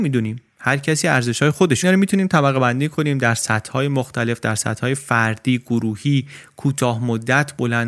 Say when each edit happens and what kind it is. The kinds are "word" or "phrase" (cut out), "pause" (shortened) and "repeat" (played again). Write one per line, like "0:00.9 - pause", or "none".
0:01.8 - phrase